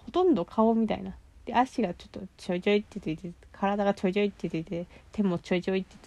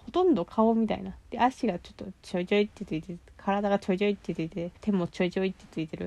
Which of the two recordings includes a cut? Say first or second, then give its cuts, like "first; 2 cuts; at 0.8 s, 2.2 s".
second; 2 cuts; at 1.2 s, 4.8 s